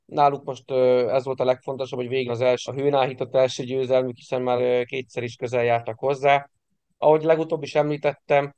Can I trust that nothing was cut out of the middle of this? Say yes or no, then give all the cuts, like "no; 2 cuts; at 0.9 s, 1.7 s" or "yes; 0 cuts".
no; 3 cuts; at 2.3 s, 2.7 s, 4.6 s